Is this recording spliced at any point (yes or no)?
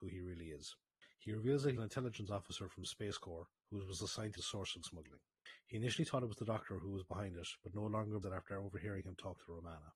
yes